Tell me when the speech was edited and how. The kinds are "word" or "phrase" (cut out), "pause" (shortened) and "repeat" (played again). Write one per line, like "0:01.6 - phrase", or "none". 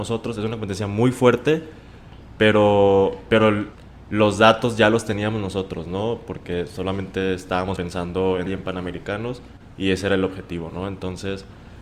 0:08.5 - phrase